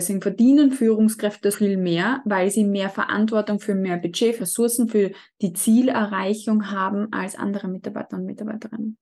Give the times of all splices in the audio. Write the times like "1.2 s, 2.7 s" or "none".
1.5 s, 4.4 s